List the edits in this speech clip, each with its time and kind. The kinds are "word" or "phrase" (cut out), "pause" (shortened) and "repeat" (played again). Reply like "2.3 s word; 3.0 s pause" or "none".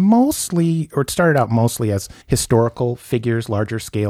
2.2 s pause